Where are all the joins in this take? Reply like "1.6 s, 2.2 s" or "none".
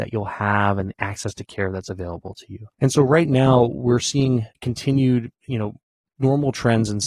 2.7 s, 4.5 s